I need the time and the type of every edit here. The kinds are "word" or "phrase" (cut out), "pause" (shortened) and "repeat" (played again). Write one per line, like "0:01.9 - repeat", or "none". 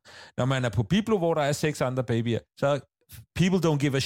0:02.5 - pause

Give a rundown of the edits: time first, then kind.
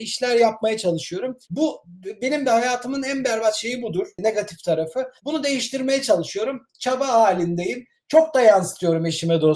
0:01.4 - pause
0:05.2 - pause

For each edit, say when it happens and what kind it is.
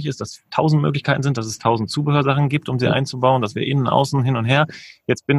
none

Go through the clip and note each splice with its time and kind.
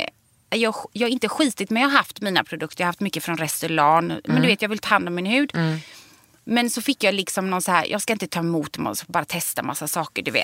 none

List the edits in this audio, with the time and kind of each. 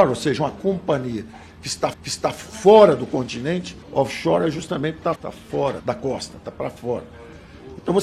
0:01.9 - repeat
0:03.8 - pause
0:05.2 - word
0:05.8 - word

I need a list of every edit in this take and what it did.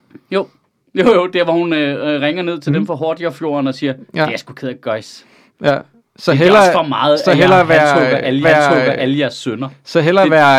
0:08.4 - repeat

